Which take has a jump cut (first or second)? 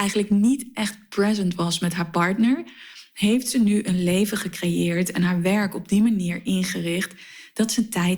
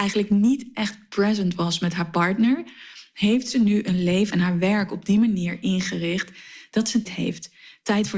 second